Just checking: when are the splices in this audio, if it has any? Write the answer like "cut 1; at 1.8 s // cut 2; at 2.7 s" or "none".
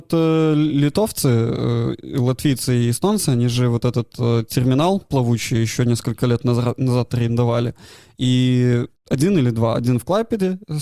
cut 1; at 9.0 s